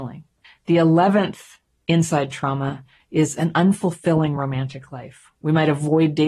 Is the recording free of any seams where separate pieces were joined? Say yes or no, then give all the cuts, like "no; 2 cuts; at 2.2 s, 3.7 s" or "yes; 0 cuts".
yes; 0 cuts